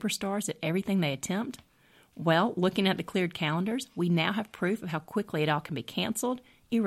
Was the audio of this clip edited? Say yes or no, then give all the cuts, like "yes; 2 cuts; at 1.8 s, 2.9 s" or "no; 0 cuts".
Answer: no; 0 cuts